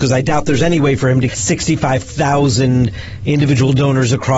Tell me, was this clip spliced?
yes; 1 cut; at 1.3 s

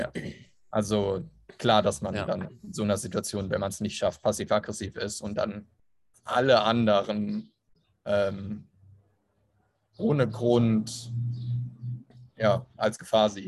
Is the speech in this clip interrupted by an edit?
no; 0 cuts

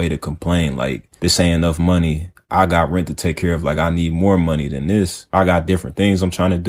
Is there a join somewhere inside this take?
no; 0 cuts

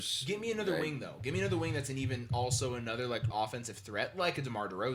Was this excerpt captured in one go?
no; 1 cut; at 3.3 s

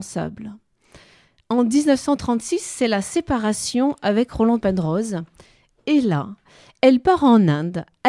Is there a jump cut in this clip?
no; 0 cuts

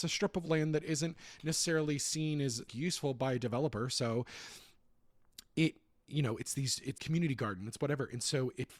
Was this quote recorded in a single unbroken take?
no; 2 cuts; at 2.7 s, 7.0 s

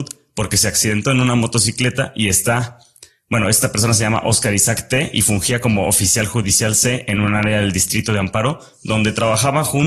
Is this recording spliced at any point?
no; 0 cuts

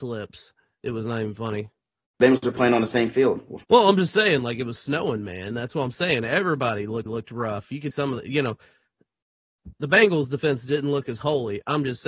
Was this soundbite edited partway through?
yes; 4 cuts; at 3.6 s, 7.1 s, 7.9 s, 9.7 s

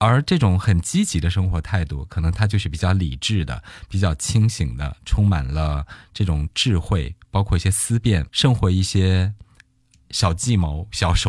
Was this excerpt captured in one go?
yes; 0 cuts

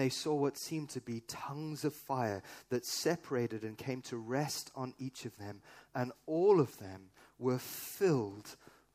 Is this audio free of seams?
yes; 0 cuts

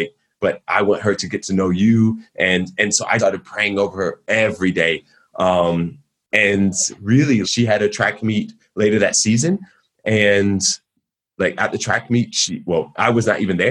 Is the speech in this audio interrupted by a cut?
yes; 2 cuts; at 3.2 s, 7.4 s

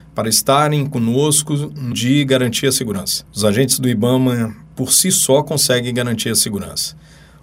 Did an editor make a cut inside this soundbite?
yes; 2 cuts; at 1.9 s, 3.3 s

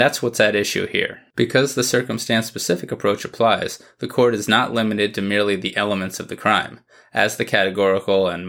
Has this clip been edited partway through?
yes; 1 cut; at 1.3 s

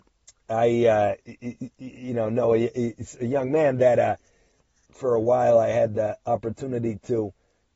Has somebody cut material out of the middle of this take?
no; 0 cuts

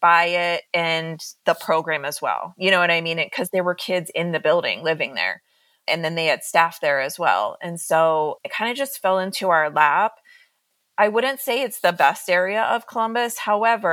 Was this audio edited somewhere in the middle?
no; 0 cuts

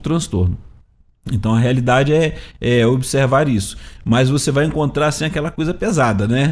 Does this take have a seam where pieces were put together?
no; 0 cuts

